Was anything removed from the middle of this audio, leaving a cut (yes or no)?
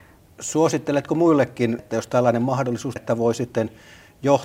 yes